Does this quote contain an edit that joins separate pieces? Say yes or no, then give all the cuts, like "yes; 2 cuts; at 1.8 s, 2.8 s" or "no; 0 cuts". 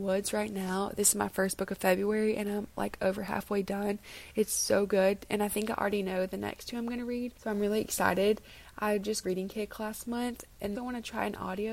yes; 2 cuts; at 9.2 s, 10.7 s